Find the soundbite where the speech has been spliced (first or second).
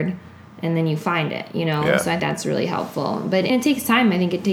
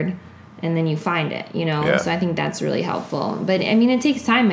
first